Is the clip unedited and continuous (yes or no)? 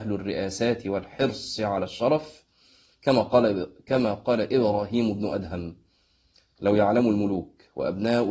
yes